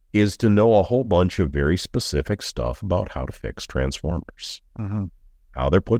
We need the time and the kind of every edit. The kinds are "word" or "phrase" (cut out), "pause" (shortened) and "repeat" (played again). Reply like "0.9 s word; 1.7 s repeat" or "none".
4.7 s pause